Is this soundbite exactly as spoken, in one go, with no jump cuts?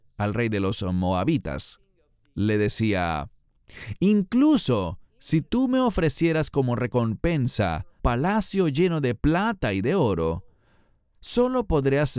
no; 1 cut; at 8.0 s

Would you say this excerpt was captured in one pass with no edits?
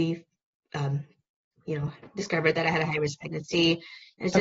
yes; 0 cuts

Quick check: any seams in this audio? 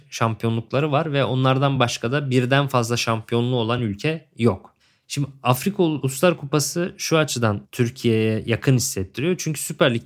no; 0 cuts

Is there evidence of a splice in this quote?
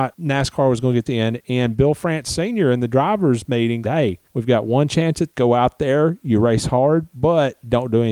yes; 3 cuts; at 1.1 s, 3.8 s, 5.3 s

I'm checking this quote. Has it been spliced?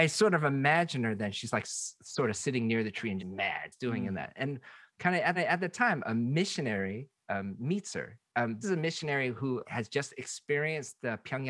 yes; 5 cuts; at 3.2 s, 3.7 s, 5.3 s, 8.6 s, 9.6 s

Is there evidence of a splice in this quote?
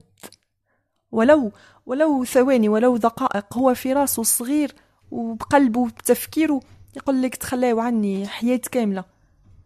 no; 0 cuts

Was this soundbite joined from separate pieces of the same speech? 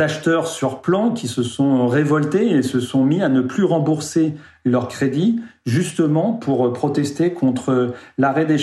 no; 0 cuts

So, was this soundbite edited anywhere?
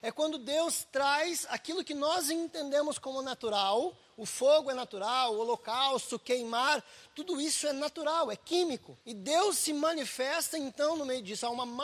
yes; 1 cut; at 9.0 s

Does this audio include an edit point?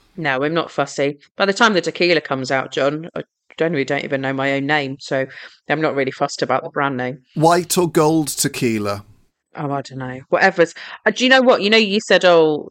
no; 0 cuts

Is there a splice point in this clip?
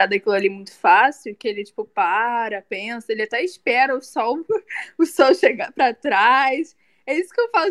no; 0 cuts

